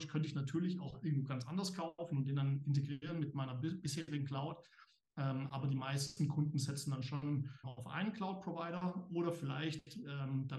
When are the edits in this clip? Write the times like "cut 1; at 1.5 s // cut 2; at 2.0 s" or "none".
cut 1; at 7.6 s